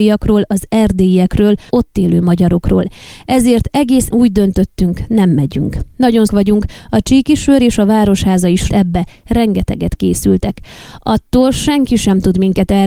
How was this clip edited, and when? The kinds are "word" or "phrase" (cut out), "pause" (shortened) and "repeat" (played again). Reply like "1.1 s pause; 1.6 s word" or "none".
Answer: 1.7 s word; 4.1 s word; 6.3 s word; 8.7 s phrase